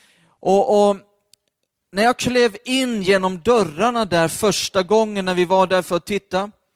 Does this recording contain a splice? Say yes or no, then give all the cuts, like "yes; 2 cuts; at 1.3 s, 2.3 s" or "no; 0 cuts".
no; 0 cuts